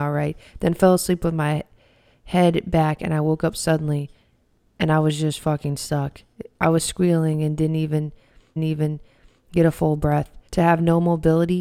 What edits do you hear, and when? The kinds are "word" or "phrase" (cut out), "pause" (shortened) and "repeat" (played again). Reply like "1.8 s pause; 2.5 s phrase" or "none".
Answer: 6.5 s pause; 8.6 s repeat; 10.5 s pause